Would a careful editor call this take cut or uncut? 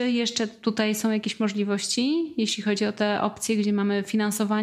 uncut